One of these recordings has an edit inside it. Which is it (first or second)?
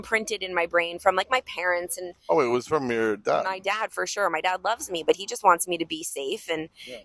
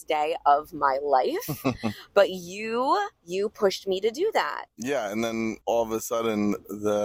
second